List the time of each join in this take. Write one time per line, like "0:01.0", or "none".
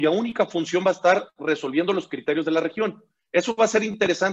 none